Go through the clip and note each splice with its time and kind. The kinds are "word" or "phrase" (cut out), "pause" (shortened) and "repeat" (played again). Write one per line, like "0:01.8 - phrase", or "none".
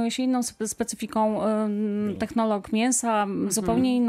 none